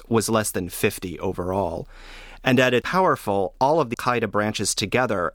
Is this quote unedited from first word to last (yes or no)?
no